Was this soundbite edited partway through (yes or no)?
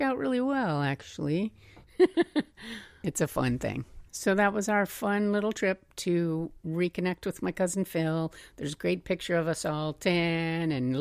yes